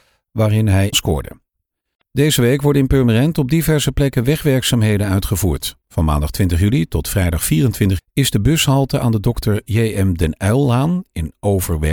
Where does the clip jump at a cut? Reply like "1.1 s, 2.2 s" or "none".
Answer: 0.9 s, 8.0 s